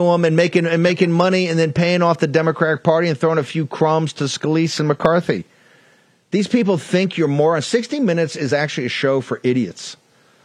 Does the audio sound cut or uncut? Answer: uncut